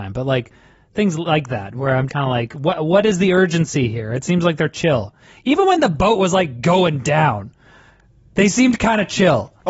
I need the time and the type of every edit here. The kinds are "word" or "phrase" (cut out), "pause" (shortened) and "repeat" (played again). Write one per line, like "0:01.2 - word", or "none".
0:02.1 - word